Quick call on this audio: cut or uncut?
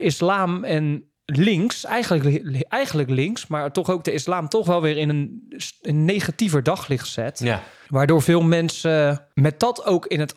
uncut